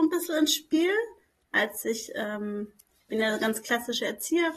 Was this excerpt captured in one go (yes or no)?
yes